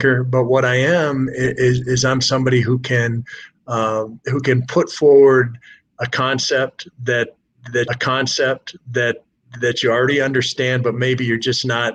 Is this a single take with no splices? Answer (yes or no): no